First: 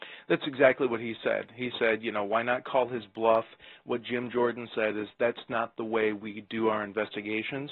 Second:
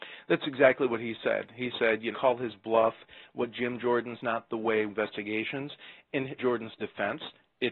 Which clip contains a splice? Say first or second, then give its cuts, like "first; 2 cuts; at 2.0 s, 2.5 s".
second; 4 cuts; at 2.1 s, 4.2 s, 4.9 s, 6.4 s